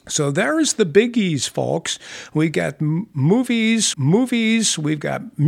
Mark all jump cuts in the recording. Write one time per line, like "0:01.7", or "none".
0:03.9